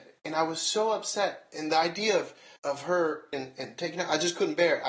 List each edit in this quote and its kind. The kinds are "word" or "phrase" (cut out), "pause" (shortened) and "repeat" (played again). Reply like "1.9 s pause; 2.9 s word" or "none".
2.6 s pause; 3.3 s phrase